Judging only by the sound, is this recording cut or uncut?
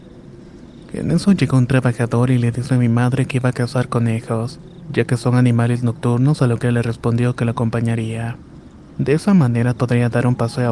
cut